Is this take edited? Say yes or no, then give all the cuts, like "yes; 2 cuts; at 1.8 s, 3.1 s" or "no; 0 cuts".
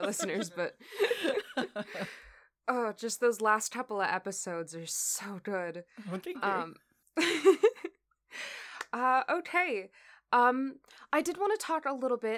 no; 0 cuts